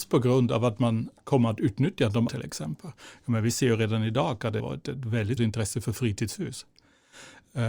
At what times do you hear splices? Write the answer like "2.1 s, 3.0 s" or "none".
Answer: 2.3 s, 4.6 s, 5.4 s